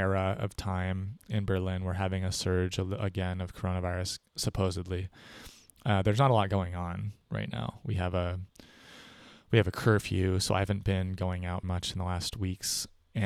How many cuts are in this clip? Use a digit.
3